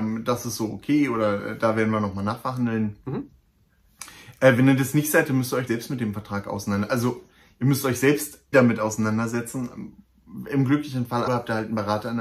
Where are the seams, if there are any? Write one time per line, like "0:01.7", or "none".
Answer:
0:05.7
0:08.5
0:11.3